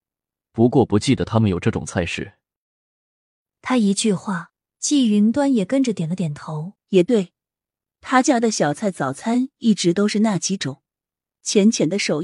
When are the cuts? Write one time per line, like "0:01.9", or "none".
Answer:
0:06.8